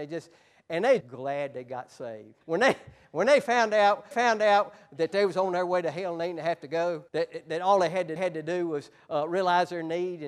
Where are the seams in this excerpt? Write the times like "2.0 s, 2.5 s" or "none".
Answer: 1.0 s, 2.4 s, 4.1 s, 7.1 s, 8.2 s